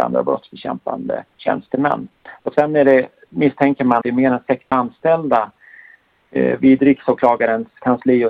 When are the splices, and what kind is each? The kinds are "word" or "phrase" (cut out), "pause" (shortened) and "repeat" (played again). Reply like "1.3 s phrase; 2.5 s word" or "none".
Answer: 1.3 s pause; 4.0 s word; 4.7 s word